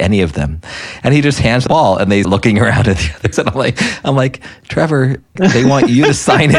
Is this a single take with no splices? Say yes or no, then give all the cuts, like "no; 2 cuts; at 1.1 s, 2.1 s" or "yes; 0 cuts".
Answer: no; 4 cuts; at 1.7 s, 2.2 s, 3.3 s, 5.4 s